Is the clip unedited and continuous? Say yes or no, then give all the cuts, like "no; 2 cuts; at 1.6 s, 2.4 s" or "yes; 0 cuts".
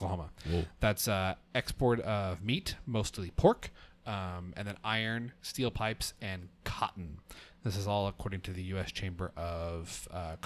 yes; 0 cuts